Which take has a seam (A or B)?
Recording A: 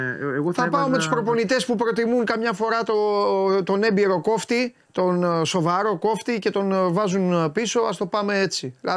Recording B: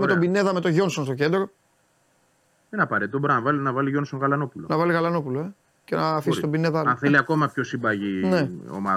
A